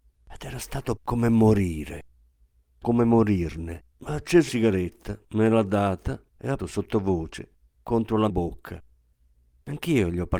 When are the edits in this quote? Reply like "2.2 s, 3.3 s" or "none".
1.0 s, 2.8 s, 3.9 s, 4.5 s, 5.2 s, 6.3 s, 6.6 s, 8.3 s